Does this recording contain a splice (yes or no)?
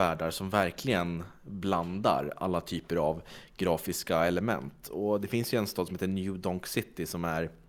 no